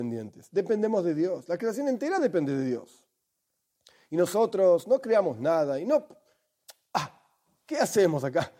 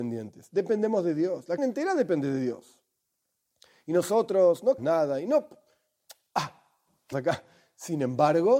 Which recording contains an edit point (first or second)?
second